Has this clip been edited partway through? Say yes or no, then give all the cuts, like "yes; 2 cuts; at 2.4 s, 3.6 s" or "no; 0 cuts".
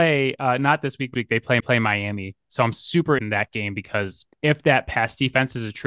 yes; 4 cuts; at 1.1 s, 1.6 s, 3.2 s, 4.3 s